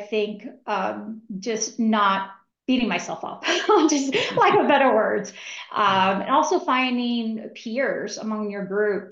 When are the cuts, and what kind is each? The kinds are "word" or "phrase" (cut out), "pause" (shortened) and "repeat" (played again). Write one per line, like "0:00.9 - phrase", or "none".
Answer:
0:02.5 - pause